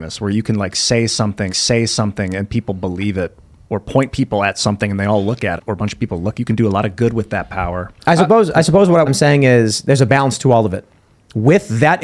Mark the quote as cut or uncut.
cut